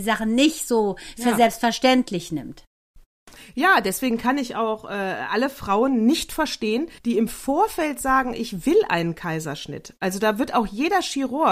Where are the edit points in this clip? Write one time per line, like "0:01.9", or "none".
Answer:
0:07.0